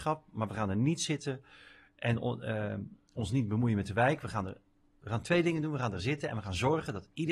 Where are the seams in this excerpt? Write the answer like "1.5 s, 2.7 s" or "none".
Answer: none